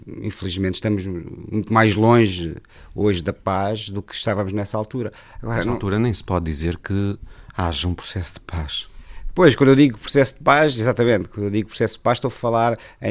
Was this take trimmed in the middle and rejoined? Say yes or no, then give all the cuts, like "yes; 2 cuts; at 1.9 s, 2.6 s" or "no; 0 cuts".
no; 0 cuts